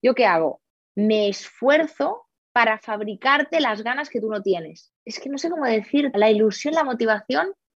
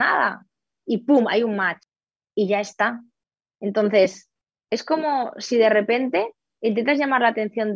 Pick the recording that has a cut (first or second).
first